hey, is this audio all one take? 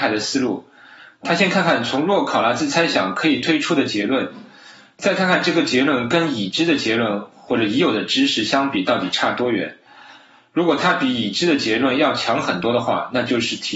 yes; 0 cuts

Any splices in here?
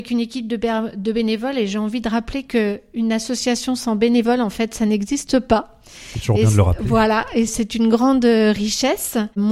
yes; 1 cut; at 7.5 s

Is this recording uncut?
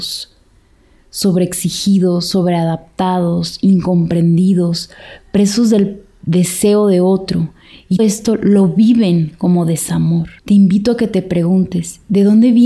no; 2 cuts; at 8.0 s, 10.4 s

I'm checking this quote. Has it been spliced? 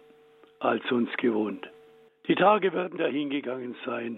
yes; 2 cuts; at 2.1 s, 3.0 s

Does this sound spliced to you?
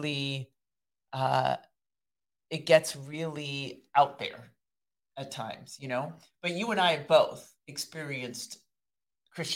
no; 0 cuts

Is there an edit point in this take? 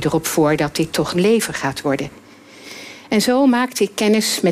yes; 1 cut; at 1.1 s

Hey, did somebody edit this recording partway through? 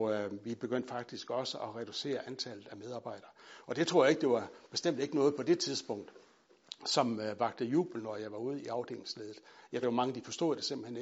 yes; 1 cut; at 9.8 s

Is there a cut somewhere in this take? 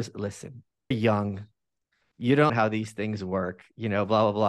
yes; 2 cuts; at 0.9 s, 2.5 s

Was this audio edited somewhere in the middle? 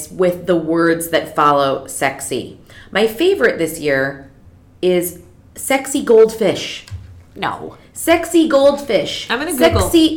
no; 0 cuts

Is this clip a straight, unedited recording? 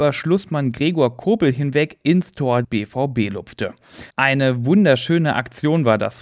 no; 2 cuts; at 2.6 s, 4.1 s

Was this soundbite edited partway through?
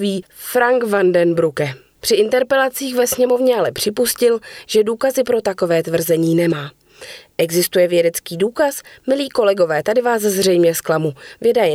no; 0 cuts

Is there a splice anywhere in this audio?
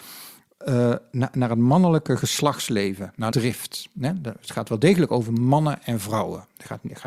yes; 1 cut; at 3.3 s

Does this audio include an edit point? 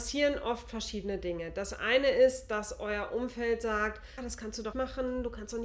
yes; 2 cuts; at 4.2 s, 4.7 s

